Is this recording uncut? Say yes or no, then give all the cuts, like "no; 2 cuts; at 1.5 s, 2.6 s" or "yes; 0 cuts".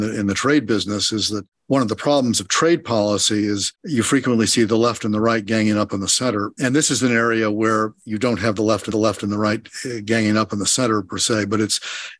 no; 1 cut; at 8.9 s